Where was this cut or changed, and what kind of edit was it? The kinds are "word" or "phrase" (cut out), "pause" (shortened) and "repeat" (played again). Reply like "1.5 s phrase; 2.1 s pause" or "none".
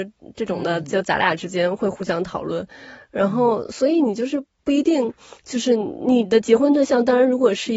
5.4 s pause